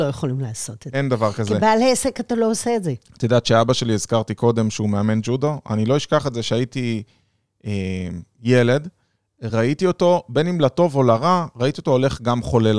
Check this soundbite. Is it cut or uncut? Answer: uncut